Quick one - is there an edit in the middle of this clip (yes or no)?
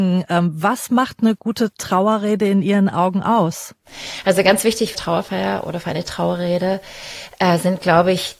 yes